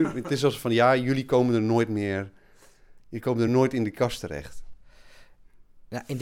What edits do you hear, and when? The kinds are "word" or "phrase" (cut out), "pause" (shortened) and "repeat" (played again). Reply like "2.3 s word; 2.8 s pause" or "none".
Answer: none

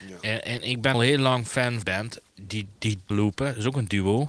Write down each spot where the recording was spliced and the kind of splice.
0.9 s word; 1.8 s phrase; 3.1 s phrase

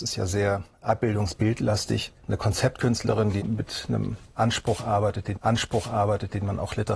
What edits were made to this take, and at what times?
2.2 s pause; 3.4 s word; 5.3 s repeat

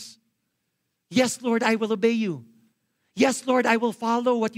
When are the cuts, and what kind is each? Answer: none

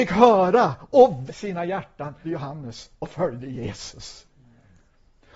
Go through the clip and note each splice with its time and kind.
1.3 s word; 2.2 s word

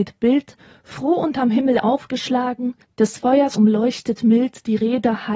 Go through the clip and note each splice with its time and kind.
2.8 s pause; 3.5 s word

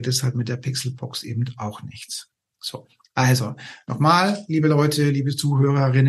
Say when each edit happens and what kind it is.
none

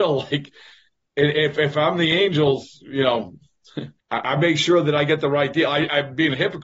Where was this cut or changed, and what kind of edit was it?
4.0 s pause

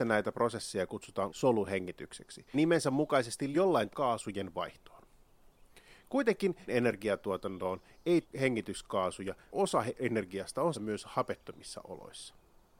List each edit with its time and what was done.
1.3 s word; 2.5 s word; 3.5 s word; 3.9 s word; 6.7 s word; 8.2 s word; 9.5 s word; 10.7 s word

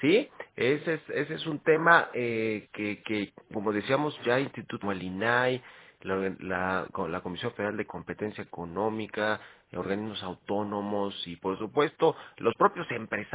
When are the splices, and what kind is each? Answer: 4.8 s word

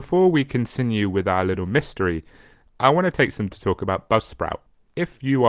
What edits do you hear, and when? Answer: 3.5 s word

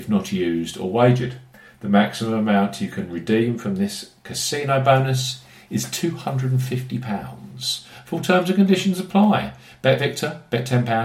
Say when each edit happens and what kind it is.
none

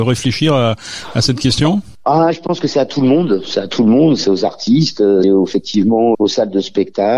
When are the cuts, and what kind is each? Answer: 5.2 s word; 6.1 s word

